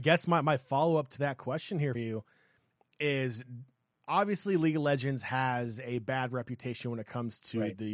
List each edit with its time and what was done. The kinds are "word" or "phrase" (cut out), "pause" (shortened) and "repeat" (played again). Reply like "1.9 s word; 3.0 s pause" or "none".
1.9 s word